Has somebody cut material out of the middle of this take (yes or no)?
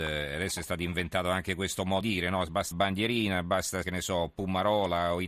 yes